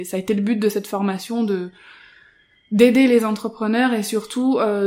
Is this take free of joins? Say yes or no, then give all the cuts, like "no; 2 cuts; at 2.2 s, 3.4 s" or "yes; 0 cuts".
yes; 0 cuts